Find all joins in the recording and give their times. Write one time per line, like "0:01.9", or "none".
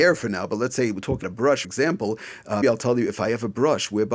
0:01.2
0:01.6
0:02.6